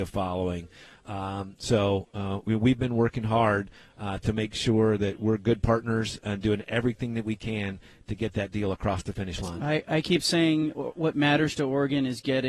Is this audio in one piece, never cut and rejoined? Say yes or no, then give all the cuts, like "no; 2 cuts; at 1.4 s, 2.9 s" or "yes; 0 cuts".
yes; 0 cuts